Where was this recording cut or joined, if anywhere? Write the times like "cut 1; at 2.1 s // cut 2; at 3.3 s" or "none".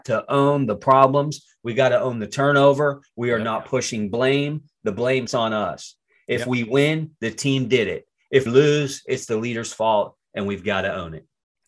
cut 1; at 5.3 s // cut 2; at 8.5 s